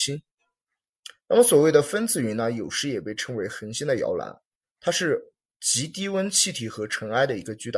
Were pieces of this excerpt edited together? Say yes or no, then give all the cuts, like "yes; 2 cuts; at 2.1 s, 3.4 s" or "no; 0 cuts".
no; 0 cuts